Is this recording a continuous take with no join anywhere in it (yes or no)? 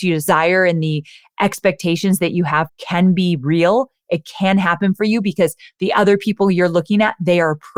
no